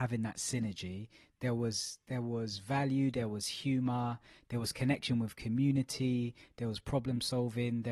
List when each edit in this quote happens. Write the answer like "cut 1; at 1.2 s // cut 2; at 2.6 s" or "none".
none